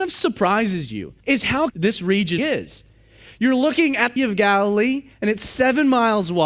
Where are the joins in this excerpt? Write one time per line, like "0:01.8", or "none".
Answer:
0:01.2
0:01.7
0:02.4
0:04.2
0:05.1